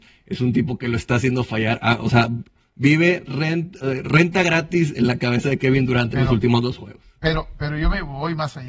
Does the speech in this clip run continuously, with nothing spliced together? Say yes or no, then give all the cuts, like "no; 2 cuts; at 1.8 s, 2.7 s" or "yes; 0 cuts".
yes; 0 cuts